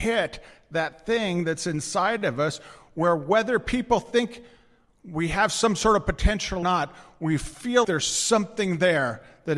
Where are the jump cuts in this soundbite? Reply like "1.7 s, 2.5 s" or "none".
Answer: 6.6 s, 7.8 s